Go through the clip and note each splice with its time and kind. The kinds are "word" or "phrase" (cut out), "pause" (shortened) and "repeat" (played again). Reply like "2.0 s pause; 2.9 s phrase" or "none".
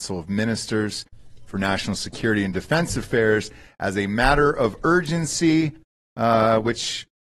none